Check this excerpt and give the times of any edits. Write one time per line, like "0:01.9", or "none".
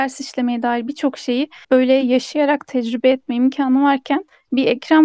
0:01.6

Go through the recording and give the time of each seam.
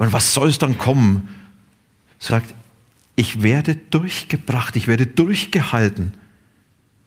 0:02.3

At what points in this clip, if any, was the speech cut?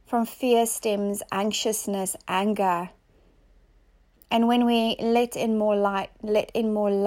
none

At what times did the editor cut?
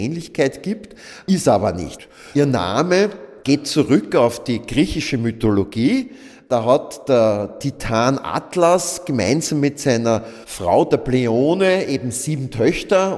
none

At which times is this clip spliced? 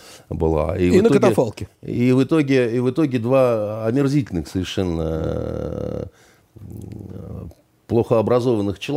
none

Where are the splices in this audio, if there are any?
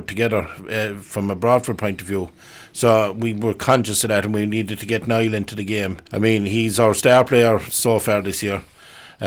0:06.1

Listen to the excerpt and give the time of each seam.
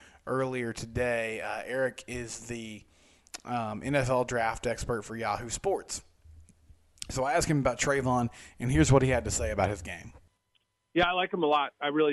none

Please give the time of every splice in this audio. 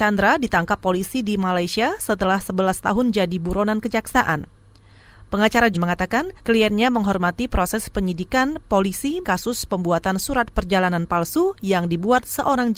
0:05.7
0:06.4
0:09.2

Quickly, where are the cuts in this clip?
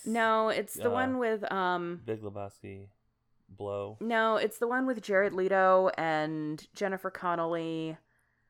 none

